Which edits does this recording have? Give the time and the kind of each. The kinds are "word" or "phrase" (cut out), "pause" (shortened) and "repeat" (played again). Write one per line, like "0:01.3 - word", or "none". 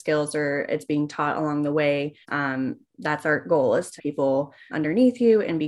0:02.2 - pause
0:04.0 - phrase
0:04.7 - word